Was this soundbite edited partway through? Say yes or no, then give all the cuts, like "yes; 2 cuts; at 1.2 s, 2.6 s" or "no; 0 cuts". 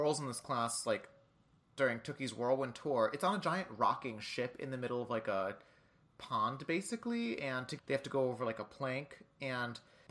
yes; 1 cut; at 7.8 s